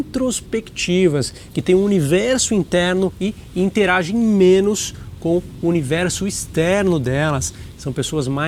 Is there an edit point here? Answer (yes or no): no